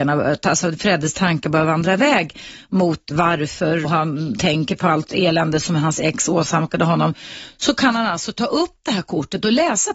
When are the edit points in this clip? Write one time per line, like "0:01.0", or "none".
0:03.1
0:03.8